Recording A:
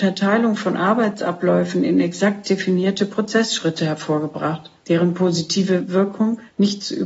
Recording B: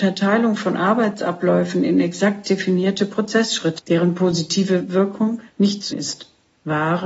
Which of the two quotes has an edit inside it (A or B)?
B